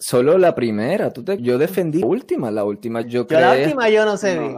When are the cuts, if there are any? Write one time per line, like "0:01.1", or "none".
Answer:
0:01.4
0:02.0
0:03.0